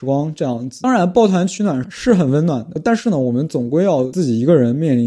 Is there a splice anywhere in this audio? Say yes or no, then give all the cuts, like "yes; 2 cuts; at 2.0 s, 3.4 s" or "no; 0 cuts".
no; 0 cuts